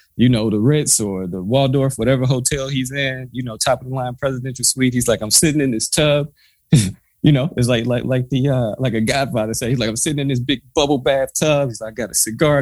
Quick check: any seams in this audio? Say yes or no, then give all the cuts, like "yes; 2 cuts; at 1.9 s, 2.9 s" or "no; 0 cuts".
no; 0 cuts